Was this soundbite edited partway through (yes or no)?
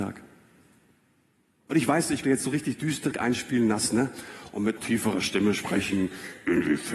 yes